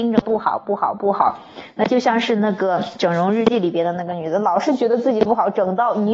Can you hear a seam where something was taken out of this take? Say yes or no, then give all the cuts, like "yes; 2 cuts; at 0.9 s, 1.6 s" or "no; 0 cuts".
no; 0 cuts